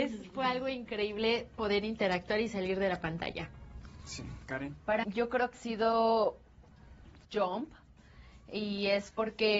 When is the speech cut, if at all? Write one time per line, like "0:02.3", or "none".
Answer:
0:05.0
0:05.5
0:07.2